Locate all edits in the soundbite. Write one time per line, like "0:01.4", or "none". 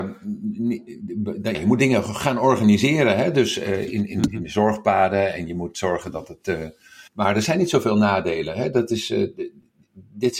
0:01.5
0:07.1